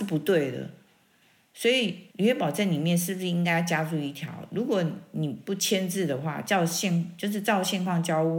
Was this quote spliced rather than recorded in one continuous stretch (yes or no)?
yes